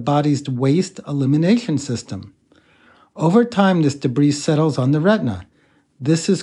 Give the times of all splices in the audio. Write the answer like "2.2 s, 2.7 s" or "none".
none